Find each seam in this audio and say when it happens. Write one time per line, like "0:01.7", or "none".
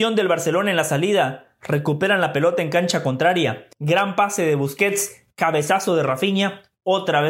0:03.7